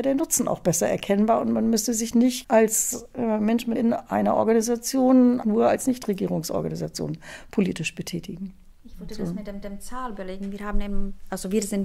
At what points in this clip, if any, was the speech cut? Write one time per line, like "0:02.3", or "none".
0:02.4
0:03.7
0:05.4
0:09.6